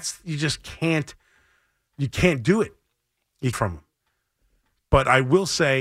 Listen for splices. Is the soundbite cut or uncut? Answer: cut